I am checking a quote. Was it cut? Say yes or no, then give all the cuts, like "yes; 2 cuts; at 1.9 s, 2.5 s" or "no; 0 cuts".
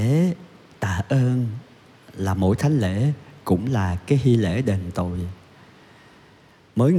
no; 0 cuts